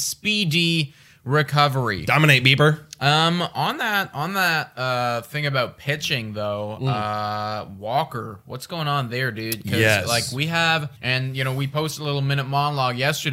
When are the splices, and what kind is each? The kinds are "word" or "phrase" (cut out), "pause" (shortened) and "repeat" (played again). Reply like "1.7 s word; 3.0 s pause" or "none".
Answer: 11.0 s pause